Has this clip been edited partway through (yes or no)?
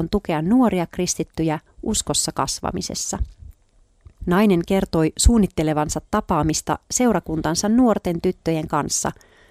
yes